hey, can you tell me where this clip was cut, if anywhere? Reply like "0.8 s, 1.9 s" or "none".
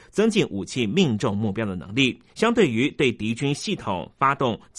2.3 s